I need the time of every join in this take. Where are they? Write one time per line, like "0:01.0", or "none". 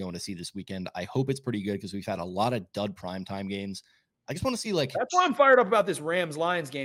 none